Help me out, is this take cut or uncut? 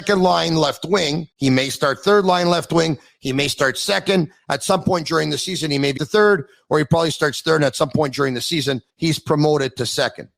cut